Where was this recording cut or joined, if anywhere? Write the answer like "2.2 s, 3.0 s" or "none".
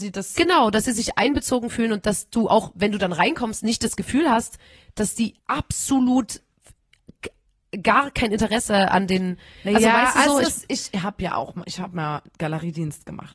5.4 s